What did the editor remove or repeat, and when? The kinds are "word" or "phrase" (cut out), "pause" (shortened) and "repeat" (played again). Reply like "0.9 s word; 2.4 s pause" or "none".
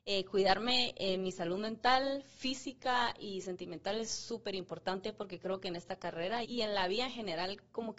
6.4 s word